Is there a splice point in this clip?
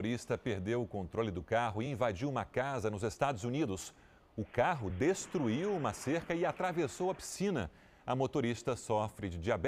no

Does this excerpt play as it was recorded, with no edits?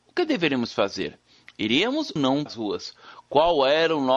no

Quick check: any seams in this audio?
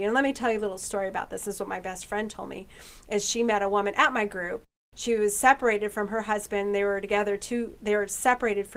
no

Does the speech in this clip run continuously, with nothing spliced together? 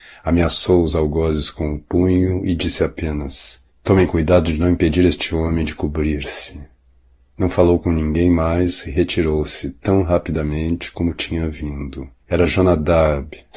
no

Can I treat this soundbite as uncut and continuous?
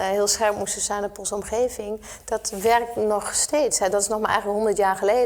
yes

